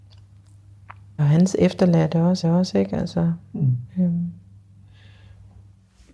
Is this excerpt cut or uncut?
cut